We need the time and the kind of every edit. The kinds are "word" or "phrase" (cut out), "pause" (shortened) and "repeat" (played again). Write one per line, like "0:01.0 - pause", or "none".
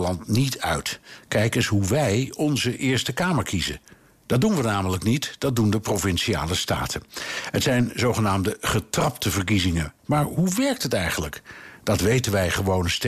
none